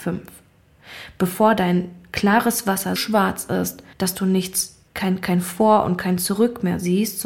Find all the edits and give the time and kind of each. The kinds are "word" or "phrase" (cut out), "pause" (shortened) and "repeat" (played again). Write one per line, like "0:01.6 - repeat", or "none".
0:03.0 - word
0:03.9 - pause
0:04.9 - pause